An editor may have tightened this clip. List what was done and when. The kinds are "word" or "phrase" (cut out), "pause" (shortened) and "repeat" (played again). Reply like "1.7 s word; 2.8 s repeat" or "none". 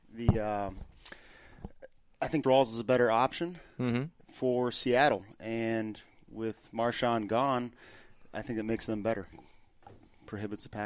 2.4 s word; 9.3 s word